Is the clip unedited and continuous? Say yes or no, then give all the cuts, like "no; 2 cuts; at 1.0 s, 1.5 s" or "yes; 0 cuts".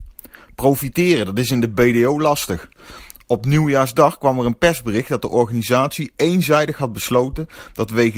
yes; 0 cuts